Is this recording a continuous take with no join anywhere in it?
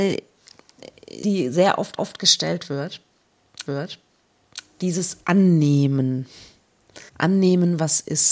no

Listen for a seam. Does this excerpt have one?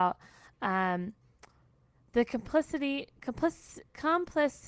no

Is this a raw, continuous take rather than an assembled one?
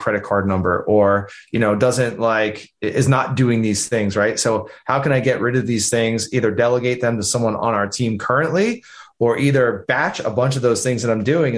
yes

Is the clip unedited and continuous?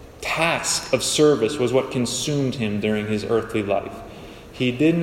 yes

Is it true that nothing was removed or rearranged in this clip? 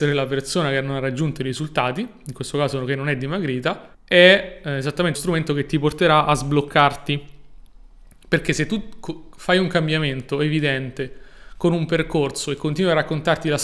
no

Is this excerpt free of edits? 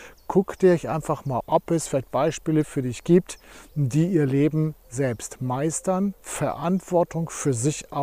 no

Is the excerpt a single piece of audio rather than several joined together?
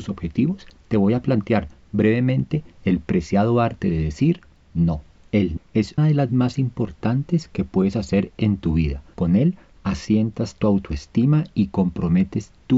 no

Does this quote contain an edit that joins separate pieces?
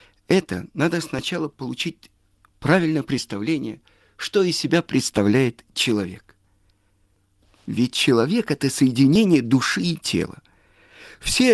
no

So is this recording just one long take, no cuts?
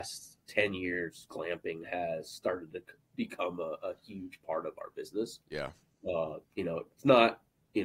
yes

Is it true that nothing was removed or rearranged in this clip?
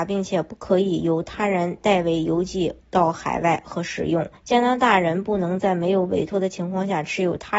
no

